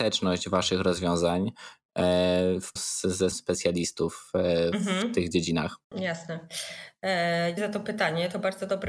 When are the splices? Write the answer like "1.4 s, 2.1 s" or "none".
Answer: 2.8 s, 3.3 s, 5.8 s, 7.6 s